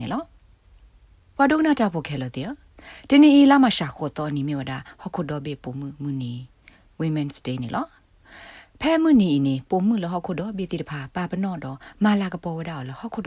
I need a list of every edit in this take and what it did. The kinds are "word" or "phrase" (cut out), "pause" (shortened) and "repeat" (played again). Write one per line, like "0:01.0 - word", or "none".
none